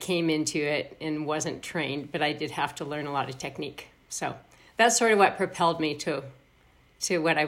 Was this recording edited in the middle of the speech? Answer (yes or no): no